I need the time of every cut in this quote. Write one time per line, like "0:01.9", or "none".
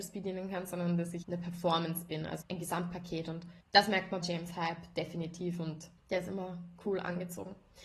0:01.2
0:02.4
0:03.6
0:04.2
0:06.0